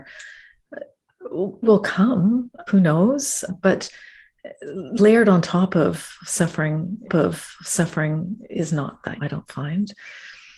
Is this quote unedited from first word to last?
no; 5 cuts; at 1.6 s, 2.7 s, 3.5 s, 7.1 s, 9.2 s

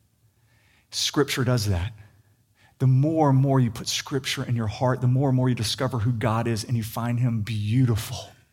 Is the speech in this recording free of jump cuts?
yes; 0 cuts

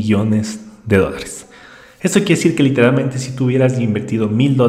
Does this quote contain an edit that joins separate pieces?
no; 0 cuts

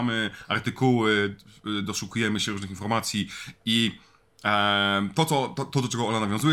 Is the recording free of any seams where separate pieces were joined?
yes; 0 cuts

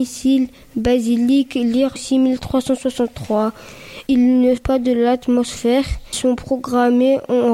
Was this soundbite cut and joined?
yes; 3 cuts; at 2.0 s, 4.6 s, 6.1 s

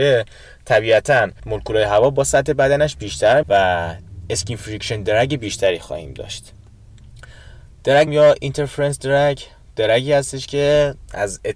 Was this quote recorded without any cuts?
no; 3 cuts; at 1.4 s, 3.4 s, 8.1 s

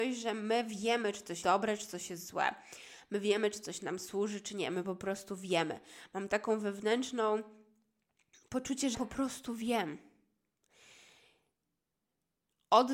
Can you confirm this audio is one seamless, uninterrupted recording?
no; 2 cuts; at 1.4 s, 8.9 s

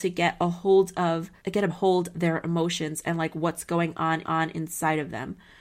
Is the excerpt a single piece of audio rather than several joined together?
no; 4 cuts; at 1.4 s, 1.7 s, 2.1 s, 4.2 s

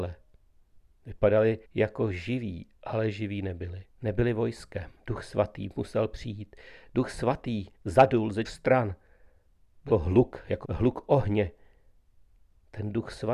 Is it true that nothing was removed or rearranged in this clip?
no; 8 cuts; at 1.6 s, 2.8 s, 3.9 s, 5.0 s, 7.8 s, 8.4 s, 9.9 s, 10.6 s

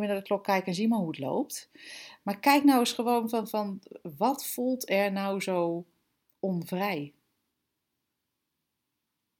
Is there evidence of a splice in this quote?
no; 0 cuts

